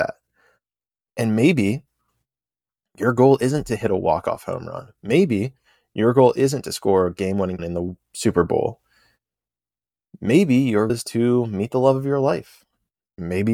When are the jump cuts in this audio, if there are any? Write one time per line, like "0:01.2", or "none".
0:07.6
0:10.9